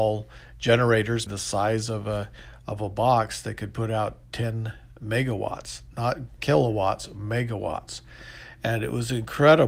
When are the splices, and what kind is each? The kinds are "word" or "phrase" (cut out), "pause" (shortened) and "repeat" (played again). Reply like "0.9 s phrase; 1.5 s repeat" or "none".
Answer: 1.3 s word